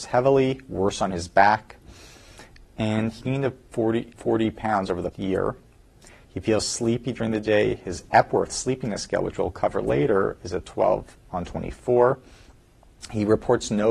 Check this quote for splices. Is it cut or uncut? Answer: cut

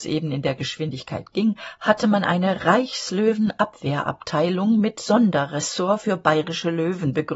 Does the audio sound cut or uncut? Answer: uncut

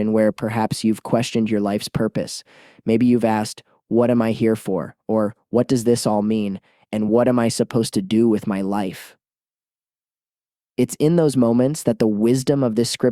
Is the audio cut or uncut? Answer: uncut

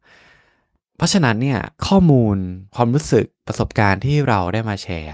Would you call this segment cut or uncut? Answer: cut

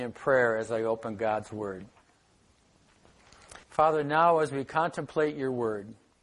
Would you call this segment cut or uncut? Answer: cut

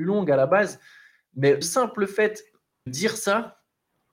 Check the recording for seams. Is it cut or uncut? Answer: cut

